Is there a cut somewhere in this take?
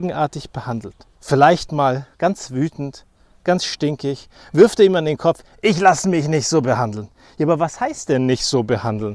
yes; 2 cuts; at 1.1 s, 2.1 s

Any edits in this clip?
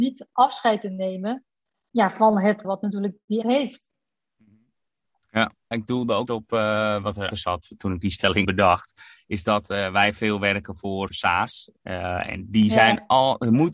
yes; 8 cuts; at 1.9 s, 2.6 s, 3.4 s, 5.7 s, 6.3 s, 7.3 s, 8.4 s, 11.1 s

